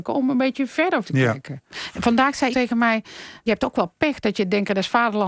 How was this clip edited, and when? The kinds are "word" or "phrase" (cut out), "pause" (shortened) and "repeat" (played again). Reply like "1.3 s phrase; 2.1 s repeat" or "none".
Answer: 1.0 s word; 2.5 s word; 3.5 s word